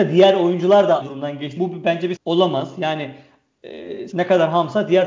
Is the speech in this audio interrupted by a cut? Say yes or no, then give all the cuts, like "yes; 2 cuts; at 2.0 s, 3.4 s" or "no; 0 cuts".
yes; 4 cuts; at 1.0 s, 1.6 s, 2.2 s, 4.1 s